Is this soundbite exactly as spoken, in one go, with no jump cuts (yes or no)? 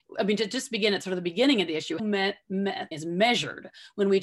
no